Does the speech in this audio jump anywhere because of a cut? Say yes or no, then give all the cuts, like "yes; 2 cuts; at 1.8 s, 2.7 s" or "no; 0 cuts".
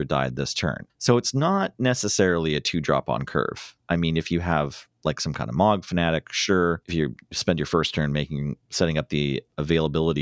no; 0 cuts